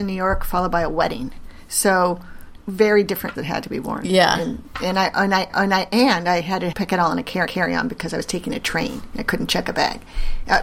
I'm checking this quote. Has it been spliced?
yes; 5 cuts; at 2.6 s, 3.3 s, 5.5 s, 6.7 s, 7.5 s

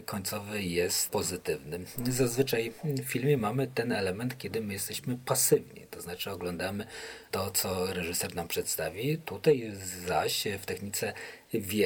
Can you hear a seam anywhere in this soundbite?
no; 0 cuts

